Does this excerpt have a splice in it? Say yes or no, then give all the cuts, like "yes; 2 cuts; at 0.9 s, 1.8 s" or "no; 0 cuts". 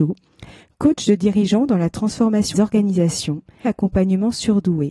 yes; 2 cuts; at 2.5 s, 3.6 s